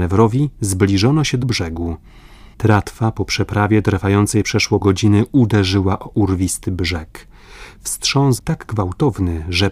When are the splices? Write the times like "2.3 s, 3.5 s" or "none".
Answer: 1.4 s, 2.5 s, 4.8 s, 8.4 s